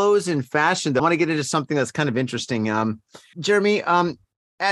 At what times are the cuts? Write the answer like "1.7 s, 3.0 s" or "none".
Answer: 1.0 s, 3.3 s